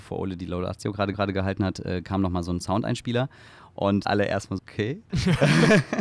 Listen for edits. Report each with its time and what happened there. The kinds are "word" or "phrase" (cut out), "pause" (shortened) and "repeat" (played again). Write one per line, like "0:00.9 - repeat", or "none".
0:01.1 - repeat
0:04.0 - word
0:04.6 - word